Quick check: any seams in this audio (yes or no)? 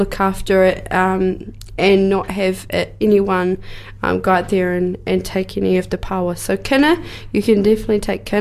no